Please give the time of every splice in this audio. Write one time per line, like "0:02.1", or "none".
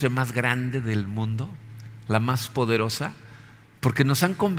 none

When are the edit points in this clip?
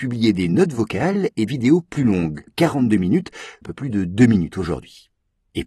0:01.5
0:02.5
0:03.6

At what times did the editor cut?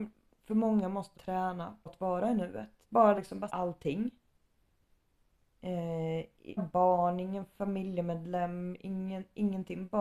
0:01.1
0:01.9
0:02.8
0:03.1
0:03.5
0:06.6

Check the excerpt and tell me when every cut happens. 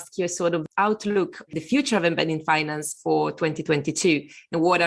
0:01.5

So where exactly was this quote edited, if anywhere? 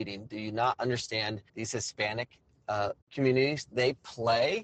0:01.5
0:03.0

